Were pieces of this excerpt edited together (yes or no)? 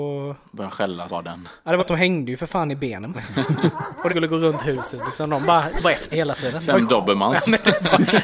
yes